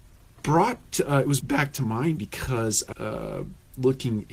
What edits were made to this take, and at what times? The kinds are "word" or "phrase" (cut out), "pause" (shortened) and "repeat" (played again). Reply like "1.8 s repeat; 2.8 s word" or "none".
1.4 s word; 2.2 s word; 2.9 s word